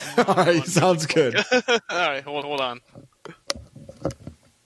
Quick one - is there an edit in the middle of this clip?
yes; 1 cut; at 2.4 s

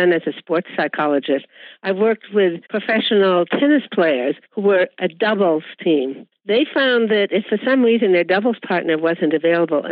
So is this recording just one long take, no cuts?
no; 3 cuts; at 2.7 s, 4.4 s, 6.3 s

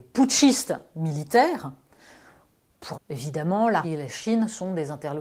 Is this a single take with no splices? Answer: no; 2 cuts; at 2.9 s, 3.8 s

